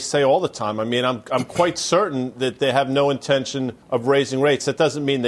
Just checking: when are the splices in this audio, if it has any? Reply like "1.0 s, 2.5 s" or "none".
3.8 s